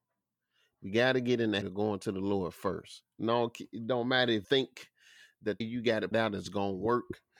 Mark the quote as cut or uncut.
cut